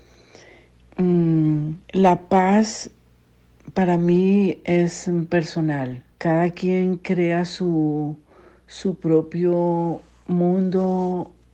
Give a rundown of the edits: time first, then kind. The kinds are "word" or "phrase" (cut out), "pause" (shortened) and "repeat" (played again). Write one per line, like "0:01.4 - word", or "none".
0:01.8 - pause
0:06.1 - pause